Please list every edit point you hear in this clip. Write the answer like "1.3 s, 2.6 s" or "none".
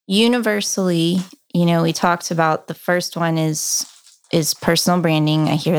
none